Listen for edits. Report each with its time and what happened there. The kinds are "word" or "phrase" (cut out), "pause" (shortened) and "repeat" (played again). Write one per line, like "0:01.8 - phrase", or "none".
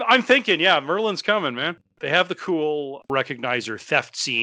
none